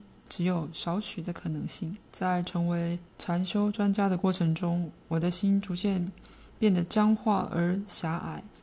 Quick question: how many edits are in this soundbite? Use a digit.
2